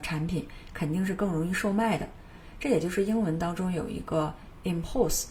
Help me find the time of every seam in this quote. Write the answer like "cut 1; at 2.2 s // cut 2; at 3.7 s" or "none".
none